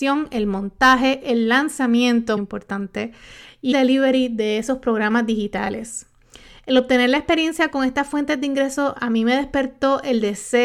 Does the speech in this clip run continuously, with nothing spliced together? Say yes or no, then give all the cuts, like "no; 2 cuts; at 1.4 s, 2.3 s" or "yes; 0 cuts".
no; 2 cuts; at 2.4 s, 3.7 s